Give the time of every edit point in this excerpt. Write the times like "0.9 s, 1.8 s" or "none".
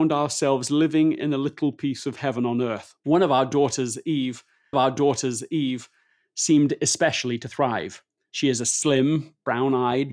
3.0 s, 4.7 s, 8.2 s